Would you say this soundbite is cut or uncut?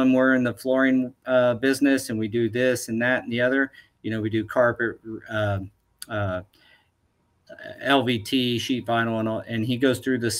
uncut